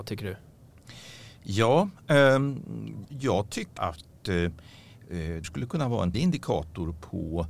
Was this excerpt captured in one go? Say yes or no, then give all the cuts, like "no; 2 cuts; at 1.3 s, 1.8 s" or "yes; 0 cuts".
no; 4 cuts; at 3.0 s, 3.8 s, 5.4 s, 6.1 s